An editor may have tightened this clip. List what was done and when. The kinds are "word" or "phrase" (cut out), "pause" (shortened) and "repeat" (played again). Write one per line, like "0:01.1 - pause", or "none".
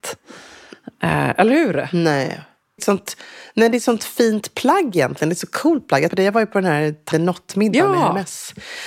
0:02.8 - phrase
0:06.1 - word
0:07.1 - word